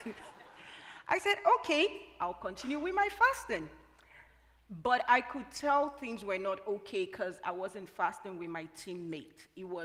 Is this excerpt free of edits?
yes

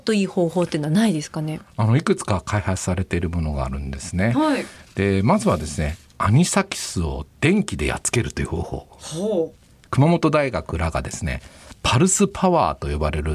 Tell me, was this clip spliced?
no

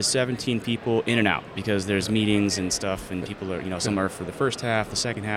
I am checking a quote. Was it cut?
no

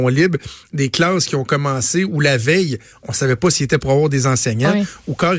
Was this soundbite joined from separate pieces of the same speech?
no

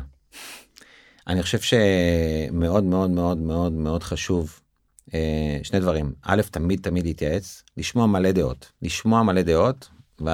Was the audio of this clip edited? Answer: yes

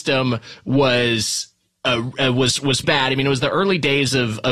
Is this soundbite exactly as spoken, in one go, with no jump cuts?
no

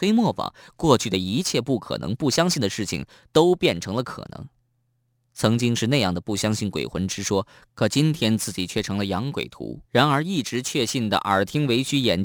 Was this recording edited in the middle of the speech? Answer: yes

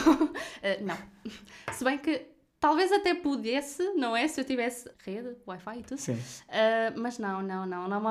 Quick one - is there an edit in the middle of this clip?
yes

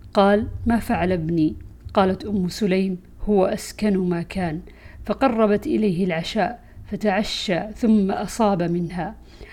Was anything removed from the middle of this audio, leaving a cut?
no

